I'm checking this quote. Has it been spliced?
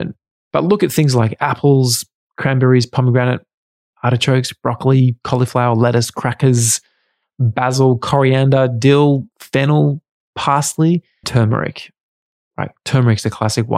yes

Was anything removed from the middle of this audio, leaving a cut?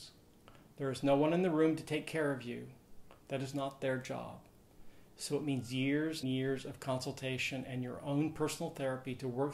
yes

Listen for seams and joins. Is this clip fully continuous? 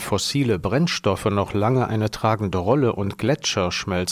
yes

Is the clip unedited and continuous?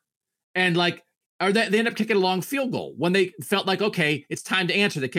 yes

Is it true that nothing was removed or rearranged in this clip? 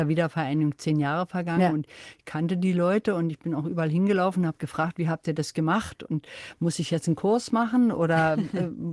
yes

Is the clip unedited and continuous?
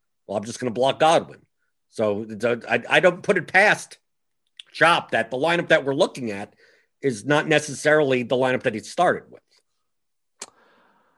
yes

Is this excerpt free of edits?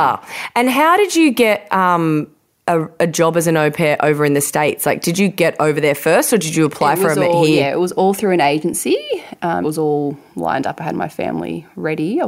no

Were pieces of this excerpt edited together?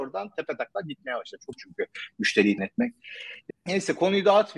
yes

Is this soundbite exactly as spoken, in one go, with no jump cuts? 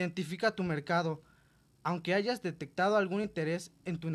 yes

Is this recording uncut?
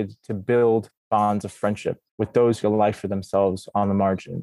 no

